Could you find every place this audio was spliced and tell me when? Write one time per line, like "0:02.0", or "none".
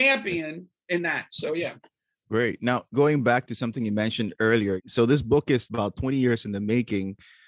none